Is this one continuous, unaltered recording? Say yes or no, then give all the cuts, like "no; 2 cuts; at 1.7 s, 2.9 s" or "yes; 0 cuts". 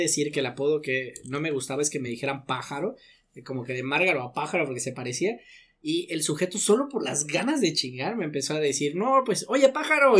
yes; 0 cuts